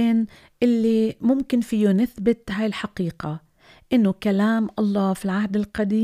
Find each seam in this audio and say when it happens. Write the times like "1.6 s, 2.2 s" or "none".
none